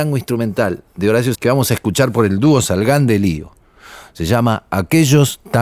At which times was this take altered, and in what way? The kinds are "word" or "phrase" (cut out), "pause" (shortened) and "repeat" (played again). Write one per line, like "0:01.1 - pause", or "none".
0:01.3 - word